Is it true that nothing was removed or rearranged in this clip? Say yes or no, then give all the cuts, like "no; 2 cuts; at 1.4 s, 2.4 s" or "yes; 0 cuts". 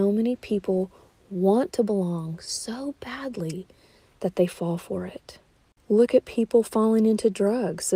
yes; 0 cuts